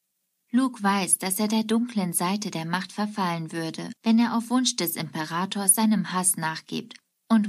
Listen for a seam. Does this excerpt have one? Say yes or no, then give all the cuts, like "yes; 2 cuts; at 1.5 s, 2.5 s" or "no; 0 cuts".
yes; 1 cut; at 4.0 s